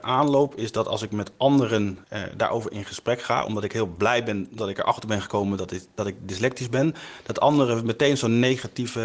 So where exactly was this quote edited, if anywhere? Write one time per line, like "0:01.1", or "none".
0:02.0